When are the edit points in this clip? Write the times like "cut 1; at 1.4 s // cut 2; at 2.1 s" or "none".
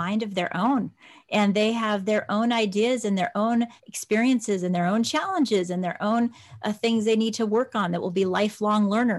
cut 1; at 3.8 s